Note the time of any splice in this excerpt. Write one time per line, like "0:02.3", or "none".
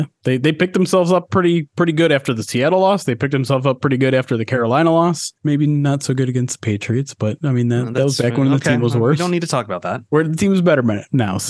0:05.4